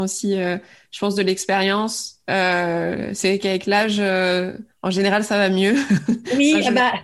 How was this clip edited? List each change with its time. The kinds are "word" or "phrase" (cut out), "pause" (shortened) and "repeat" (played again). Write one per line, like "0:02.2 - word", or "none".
0:04.7 - pause